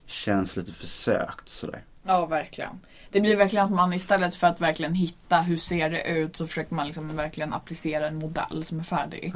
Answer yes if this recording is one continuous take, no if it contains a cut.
yes